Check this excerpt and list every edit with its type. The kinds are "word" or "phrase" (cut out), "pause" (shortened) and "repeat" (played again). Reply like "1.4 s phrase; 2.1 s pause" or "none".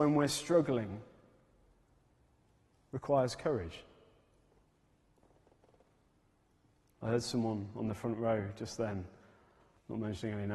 none